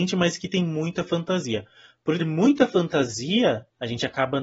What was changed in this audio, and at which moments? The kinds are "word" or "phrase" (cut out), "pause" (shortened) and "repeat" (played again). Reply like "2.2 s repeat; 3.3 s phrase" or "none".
2.2 s word